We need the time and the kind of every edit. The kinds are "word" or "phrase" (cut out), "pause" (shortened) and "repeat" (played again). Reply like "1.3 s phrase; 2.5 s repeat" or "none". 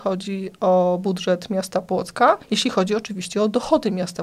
2.4 s pause